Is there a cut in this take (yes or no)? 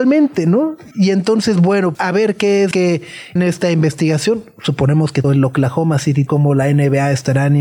yes